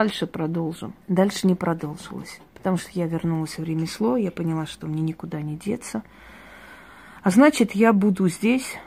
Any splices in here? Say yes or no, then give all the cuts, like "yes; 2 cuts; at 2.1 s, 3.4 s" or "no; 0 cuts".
yes; 2 cuts; at 1.0 s, 2.5 s